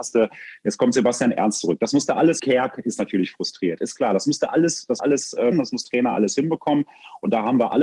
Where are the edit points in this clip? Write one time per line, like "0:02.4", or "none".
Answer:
0:02.4
0:05.0
0:05.5
0:05.8